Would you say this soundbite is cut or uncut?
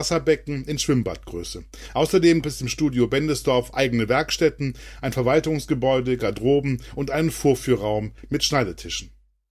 cut